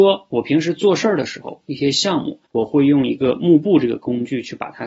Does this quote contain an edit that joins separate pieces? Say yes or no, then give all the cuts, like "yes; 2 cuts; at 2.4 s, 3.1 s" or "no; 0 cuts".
yes; 1 cut; at 2.5 s